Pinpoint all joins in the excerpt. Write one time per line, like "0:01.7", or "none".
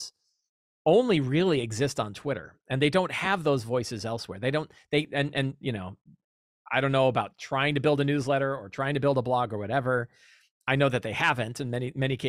none

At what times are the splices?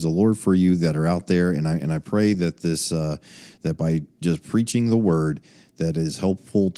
none

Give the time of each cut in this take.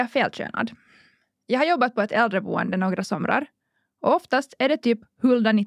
none

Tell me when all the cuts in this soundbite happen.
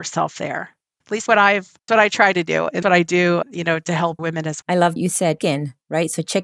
0:01.3
0:01.9
0:02.8
0:03.4
0:04.2
0:04.6
0:05.0
0:05.4

